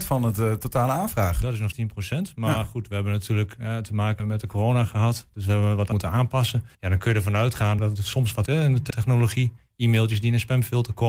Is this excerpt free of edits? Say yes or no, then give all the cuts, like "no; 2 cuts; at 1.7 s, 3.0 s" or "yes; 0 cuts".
no; 7 cuts; at 1.7 s, 4.2 s, 5.9 s, 6.7 s, 7.8 s, 8.5 s, 8.9 s